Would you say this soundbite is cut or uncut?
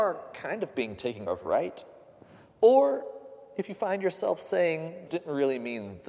cut